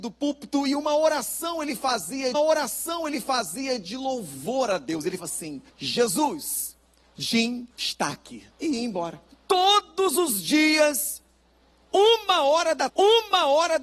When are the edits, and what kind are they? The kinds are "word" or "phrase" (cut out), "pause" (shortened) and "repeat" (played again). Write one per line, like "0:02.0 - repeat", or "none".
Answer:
0:02.3 - repeat
0:05.2 - word
0:05.7 - pause
0:07.7 - pause
0:08.5 - pause
0:09.3 - pause
0:12.9 - repeat

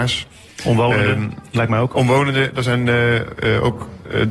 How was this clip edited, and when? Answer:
none

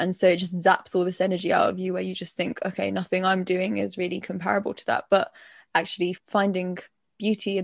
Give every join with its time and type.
none

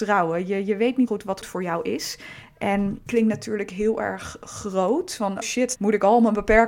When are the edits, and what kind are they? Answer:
0:01.1 - word
0:01.4 - word
0:03.1 - word
0:05.4 - word
0:05.8 - word

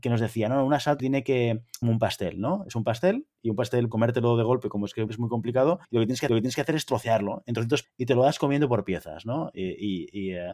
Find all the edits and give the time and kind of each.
0:01.0 - word
0:01.8 - phrase
0:03.9 - word
0:05.1 - word
0:05.8 - pause
0:06.3 - repeat
0:07.8 - word

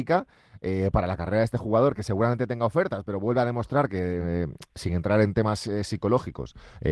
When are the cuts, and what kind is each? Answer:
none

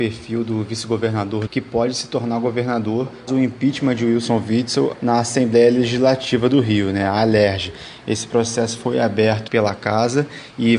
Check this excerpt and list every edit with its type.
0:01.5 - phrase
0:03.3 - word
0:04.9 - word
0:09.5 - word

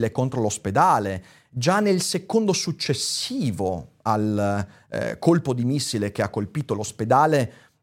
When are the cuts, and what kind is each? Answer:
none

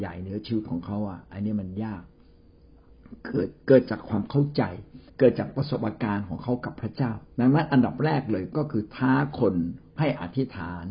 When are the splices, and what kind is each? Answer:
0:05.1 - pause
0:07.3 - pause

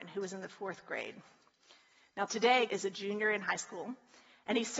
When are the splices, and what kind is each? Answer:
0:02.7 - word

